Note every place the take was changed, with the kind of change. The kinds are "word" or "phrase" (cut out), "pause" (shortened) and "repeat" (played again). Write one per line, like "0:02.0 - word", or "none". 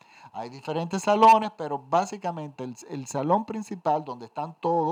none